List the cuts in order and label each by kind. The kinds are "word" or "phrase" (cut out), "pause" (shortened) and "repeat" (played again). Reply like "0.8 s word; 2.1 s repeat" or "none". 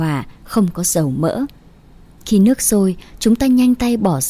none